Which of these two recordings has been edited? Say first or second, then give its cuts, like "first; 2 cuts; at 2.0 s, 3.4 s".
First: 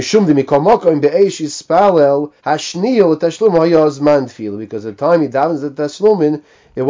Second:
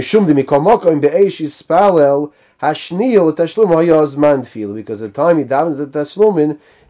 first; 1 cut; at 2.4 s